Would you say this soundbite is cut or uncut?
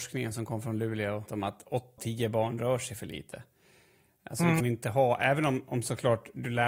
cut